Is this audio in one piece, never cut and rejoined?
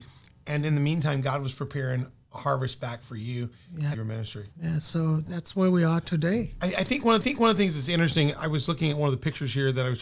no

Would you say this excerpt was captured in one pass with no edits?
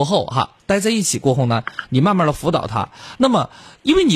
yes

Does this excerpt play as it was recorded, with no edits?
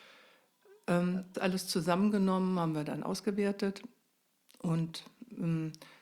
no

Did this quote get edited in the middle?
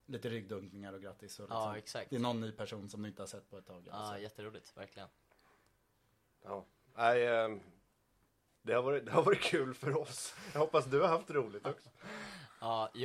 no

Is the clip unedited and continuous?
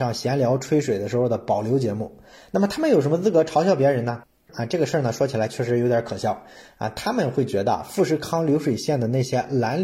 yes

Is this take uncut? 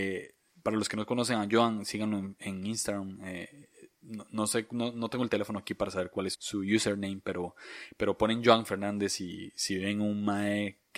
no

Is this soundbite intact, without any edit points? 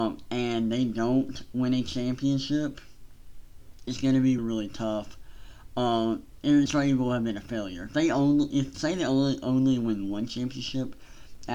no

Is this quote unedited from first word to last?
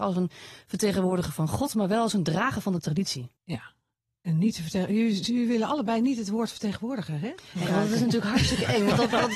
no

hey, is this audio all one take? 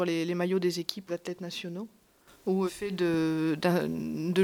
no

